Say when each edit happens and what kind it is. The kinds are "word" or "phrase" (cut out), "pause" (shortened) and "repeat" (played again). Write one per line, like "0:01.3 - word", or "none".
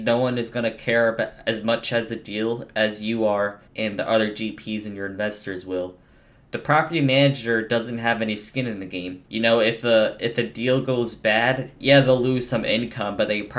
0:03.7 - pause
0:09.3 - pause
0:11.8 - pause

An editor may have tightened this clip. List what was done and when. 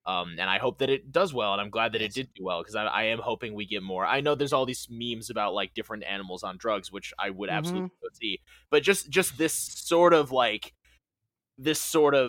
none

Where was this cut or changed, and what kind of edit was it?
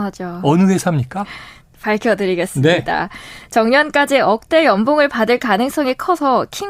none

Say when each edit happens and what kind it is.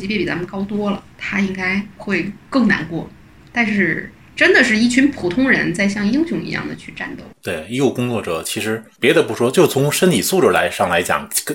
0:01.1 - pause
0:02.4 - pause
0:04.2 - pause
0:07.3 - pause
0:09.0 - word

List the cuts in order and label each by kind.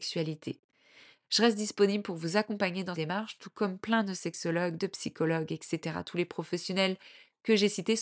0:02.9 - word

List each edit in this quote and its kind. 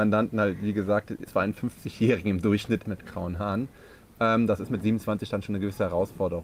0:01.3 - word
0:02.8 - word

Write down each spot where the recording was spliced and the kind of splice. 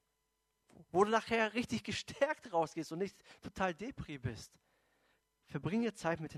none

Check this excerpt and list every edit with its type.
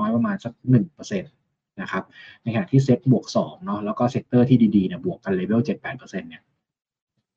none

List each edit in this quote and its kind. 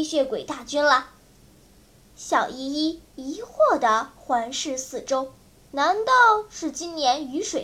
0:05.6 - pause

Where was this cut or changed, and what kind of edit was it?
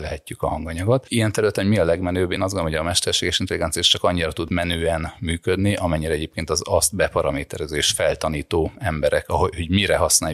none

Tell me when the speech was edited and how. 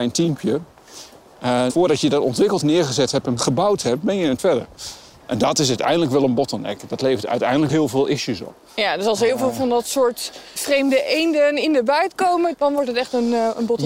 0:01.7 - word
0:02.6 - word
0:04.4 - word
0:07.7 - word
0:10.6 - word
0:12.5 - word

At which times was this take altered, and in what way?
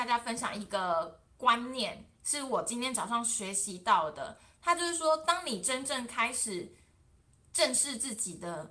none

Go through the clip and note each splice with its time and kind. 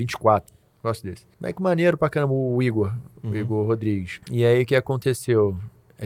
0:01.3 - pause
0:04.2 - pause

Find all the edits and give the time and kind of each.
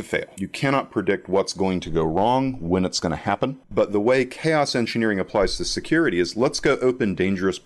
0:03.6 - pause

